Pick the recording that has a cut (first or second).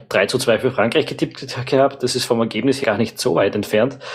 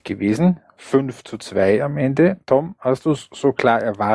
first